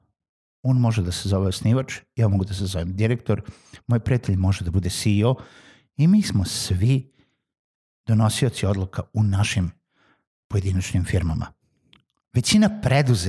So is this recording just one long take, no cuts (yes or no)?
yes